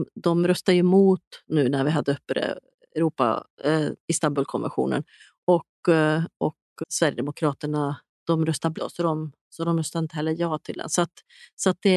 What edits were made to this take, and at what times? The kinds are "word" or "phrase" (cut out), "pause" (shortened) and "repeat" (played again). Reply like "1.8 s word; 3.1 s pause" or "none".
4.0 s pause; 6.8 s word; 8.7 s word